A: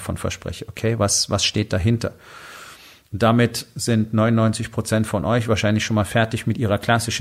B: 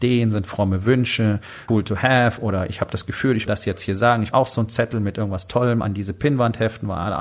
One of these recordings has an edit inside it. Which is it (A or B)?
B